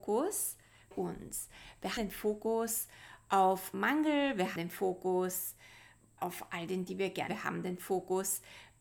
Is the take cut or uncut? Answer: cut